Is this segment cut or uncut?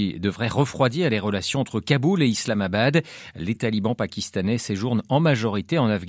uncut